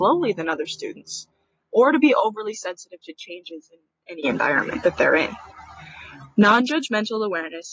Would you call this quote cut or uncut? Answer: uncut